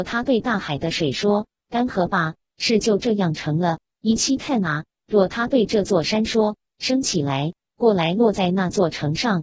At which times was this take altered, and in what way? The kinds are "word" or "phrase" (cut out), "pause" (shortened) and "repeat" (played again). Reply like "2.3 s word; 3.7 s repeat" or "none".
none